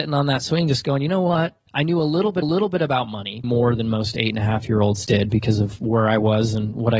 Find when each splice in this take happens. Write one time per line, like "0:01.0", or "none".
0:01.7
0:02.4
0:03.4